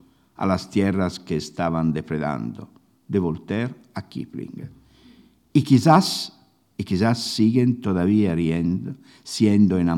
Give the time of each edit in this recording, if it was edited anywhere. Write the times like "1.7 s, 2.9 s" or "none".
none